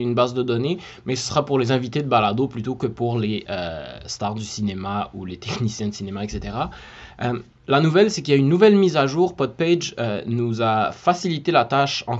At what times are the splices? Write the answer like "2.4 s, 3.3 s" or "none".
7.6 s